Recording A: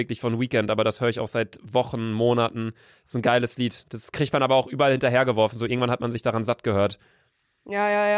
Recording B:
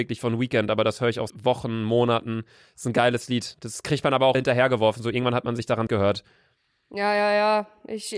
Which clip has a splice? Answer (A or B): B